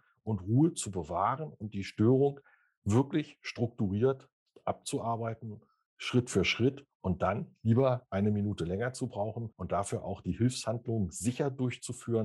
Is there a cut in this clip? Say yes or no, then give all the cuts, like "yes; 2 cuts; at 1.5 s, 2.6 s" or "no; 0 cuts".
no; 0 cuts